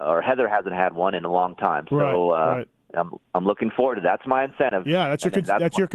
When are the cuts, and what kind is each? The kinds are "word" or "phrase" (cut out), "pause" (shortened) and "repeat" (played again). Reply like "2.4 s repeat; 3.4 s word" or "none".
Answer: 2.8 s pause